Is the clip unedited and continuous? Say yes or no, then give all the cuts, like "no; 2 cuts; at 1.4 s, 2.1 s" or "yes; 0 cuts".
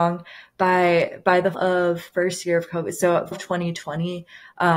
no; 3 cuts; at 1.5 s, 2.1 s, 3.3 s